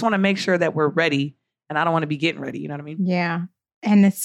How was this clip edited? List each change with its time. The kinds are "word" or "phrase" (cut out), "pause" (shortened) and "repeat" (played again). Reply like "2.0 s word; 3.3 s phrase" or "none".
none